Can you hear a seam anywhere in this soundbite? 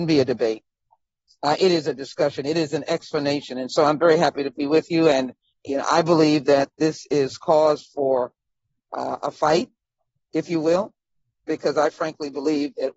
yes; 1 cut; at 5.5 s

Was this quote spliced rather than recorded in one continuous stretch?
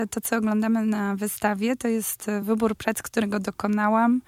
no; 0 cuts

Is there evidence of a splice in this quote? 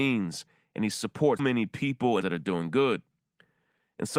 yes; 2 cuts; at 1.4 s, 2.2 s

